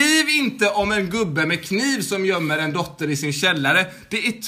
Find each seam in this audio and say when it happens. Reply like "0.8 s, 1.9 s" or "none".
none

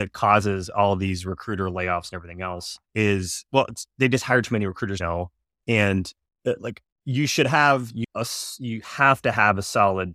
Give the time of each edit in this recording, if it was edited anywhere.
2.8 s, 5.0 s, 8.0 s

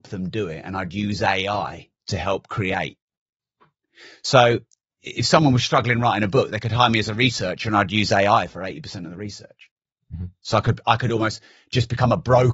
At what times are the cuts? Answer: none

